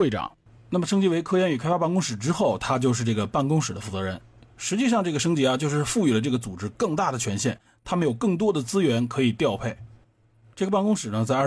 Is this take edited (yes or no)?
no